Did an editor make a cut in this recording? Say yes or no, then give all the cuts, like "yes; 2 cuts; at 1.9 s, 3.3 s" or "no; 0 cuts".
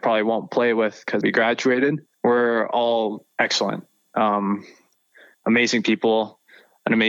yes; 3 cuts; at 1.2 s, 2.1 s, 3.3 s